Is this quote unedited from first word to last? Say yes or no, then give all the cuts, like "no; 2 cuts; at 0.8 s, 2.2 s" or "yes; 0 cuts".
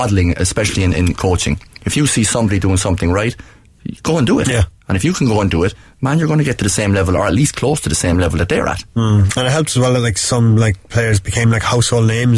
yes; 0 cuts